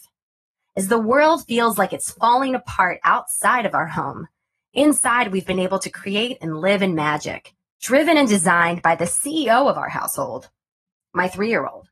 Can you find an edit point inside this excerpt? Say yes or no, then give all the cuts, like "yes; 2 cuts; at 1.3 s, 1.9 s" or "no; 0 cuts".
no; 0 cuts